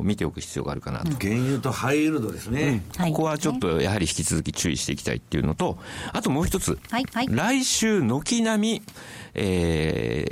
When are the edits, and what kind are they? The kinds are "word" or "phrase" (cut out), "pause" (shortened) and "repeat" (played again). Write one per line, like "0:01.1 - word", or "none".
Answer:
0:07.0 - repeat